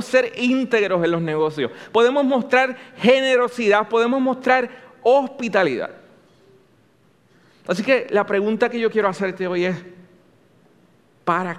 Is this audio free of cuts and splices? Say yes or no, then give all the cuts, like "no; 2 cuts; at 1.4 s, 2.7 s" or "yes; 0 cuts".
yes; 0 cuts